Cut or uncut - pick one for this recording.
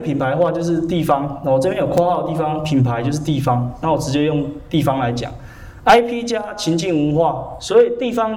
uncut